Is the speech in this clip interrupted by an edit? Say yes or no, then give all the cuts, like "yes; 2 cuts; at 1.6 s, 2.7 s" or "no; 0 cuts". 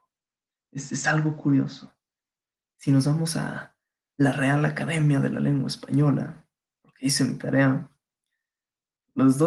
no; 0 cuts